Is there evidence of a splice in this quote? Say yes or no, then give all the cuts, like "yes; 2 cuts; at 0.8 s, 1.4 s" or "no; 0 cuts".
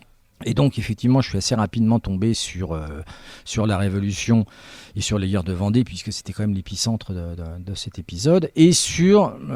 no; 0 cuts